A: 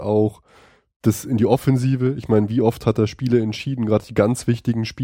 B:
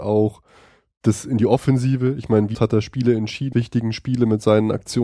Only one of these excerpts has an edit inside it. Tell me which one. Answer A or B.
B